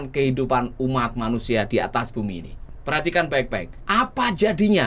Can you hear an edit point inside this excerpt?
no; 0 cuts

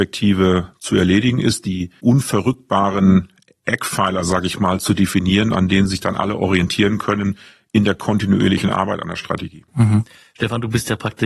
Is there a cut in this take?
no; 0 cuts

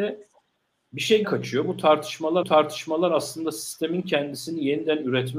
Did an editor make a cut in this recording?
yes; 2 cuts; at 1.2 s, 2.4 s

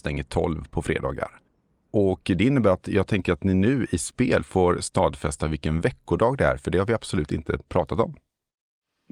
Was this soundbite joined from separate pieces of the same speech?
no; 0 cuts

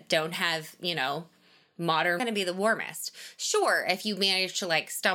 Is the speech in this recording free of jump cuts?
no; 1 cut; at 2.2 s

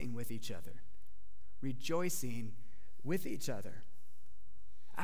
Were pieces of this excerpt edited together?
no; 0 cuts

